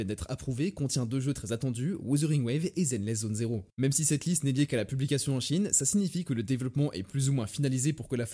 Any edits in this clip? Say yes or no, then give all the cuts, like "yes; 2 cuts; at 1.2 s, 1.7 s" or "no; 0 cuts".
no; 0 cuts